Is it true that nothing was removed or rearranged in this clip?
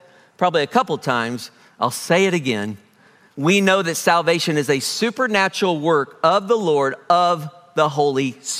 yes; 0 cuts

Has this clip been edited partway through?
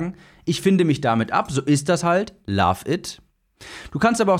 no; 0 cuts

